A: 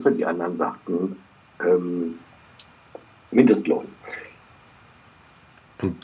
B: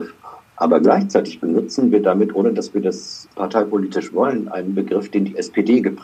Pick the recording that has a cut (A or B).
B